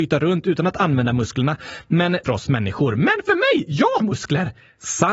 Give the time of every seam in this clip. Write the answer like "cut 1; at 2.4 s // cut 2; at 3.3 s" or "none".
cut 1; at 2.2 s // cut 2; at 4.0 s

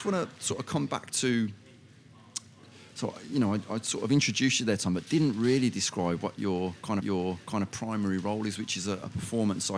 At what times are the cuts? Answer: cut 1; at 7.0 s

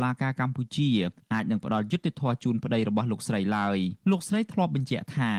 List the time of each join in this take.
cut 1; at 4.0 s

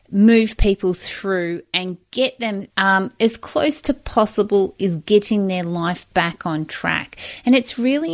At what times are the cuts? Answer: cut 1; at 2.7 s

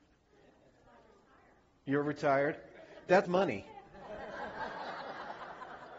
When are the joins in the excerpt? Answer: cut 1; at 3.2 s

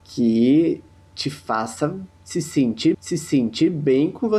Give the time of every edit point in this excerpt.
cut 1; at 2.9 s

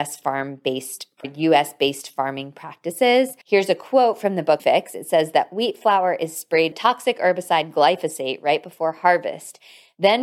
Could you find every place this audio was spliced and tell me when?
cut 1; at 1.2 s // cut 2; at 3.4 s // cut 3; at 4.6 s // cut 4; at 6.7 s

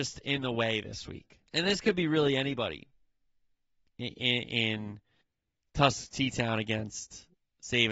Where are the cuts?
cut 1; at 1.5 s // cut 2; at 5.2 s

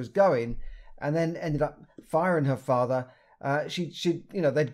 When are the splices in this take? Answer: none

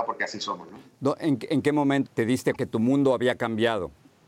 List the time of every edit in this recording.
cut 1; at 2.1 s // cut 2; at 2.6 s

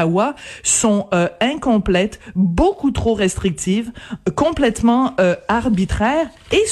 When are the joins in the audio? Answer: none

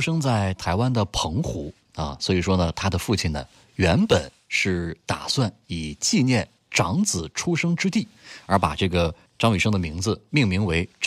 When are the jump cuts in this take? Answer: none

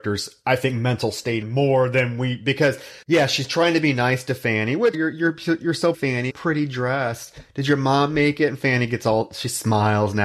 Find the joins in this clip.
cut 1; at 1.4 s // cut 2; at 3.0 s // cut 3; at 4.9 s // cut 4; at 5.9 s // cut 5; at 6.3 s

